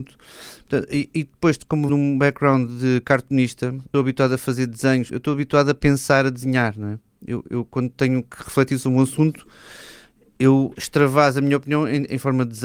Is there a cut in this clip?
yes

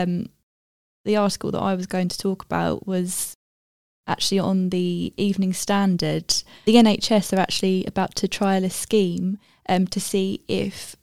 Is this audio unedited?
yes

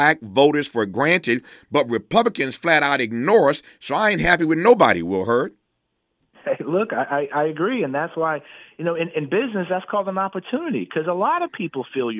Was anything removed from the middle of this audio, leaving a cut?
no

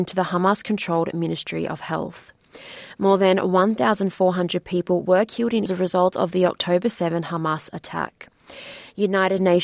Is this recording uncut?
no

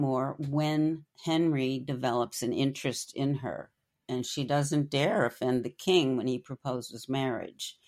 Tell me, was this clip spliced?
no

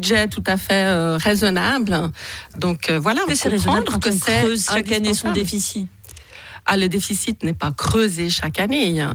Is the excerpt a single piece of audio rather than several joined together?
no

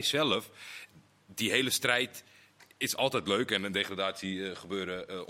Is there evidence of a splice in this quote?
no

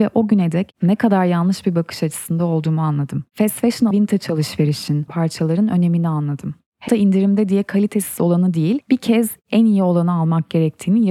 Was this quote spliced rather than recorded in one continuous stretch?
yes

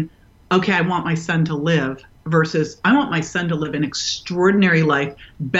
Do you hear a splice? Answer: no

